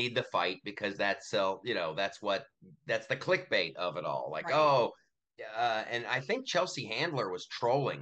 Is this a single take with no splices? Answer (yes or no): yes